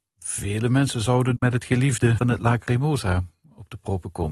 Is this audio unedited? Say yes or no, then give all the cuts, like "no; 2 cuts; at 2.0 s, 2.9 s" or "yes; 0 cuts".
no; 2 cuts; at 1.4 s, 2.2 s